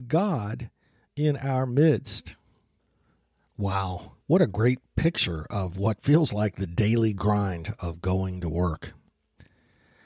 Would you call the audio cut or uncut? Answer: cut